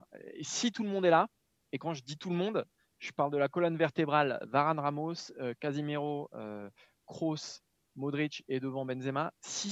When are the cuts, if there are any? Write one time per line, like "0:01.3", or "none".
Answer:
none